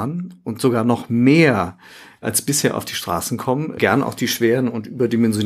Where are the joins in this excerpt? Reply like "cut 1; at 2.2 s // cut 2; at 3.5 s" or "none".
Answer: none